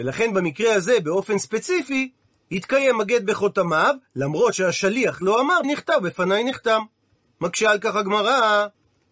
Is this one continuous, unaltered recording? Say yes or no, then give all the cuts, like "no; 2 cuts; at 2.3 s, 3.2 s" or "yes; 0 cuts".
no; 1 cut; at 5.6 s